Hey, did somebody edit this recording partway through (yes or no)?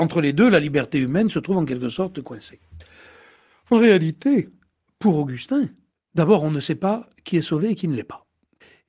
no